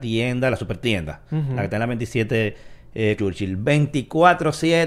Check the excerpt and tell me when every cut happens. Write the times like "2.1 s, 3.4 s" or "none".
3.2 s

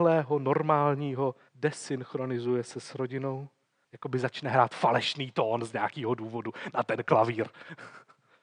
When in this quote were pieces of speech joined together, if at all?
1.5 s

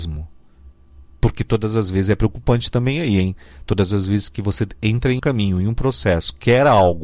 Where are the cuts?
5.2 s

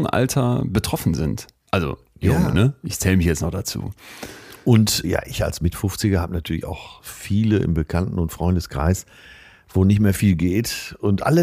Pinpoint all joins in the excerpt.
5.0 s, 7.0 s

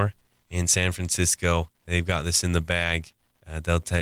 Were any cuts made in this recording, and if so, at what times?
1.7 s

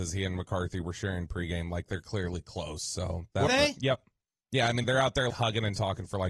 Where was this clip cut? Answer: 3.5 s, 4.8 s, 5.3 s

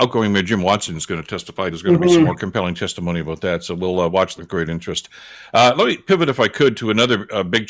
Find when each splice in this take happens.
1.7 s, 4.4 s

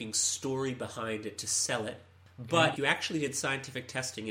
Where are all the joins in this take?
2.8 s

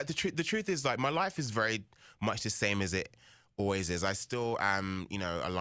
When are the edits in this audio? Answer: none

